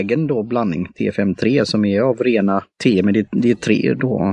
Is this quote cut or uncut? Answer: cut